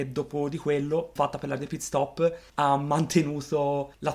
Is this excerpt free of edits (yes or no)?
no